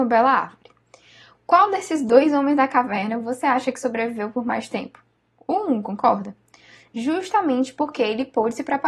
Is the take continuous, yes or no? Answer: yes